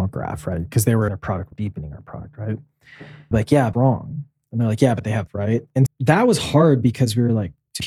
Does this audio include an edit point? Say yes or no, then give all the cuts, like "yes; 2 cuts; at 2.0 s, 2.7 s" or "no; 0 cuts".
yes; 6 cuts; at 1.1 s, 1.5 s, 3.3 s, 3.7 s, 5.3 s, 5.9 s